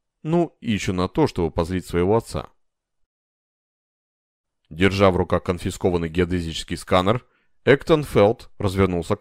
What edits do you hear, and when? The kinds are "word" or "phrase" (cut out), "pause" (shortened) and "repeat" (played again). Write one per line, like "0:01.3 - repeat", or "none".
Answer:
none